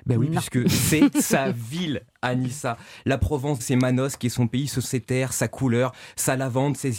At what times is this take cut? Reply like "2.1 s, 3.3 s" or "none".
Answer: 3.6 s, 4.8 s